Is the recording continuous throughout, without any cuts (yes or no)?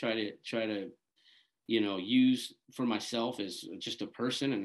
yes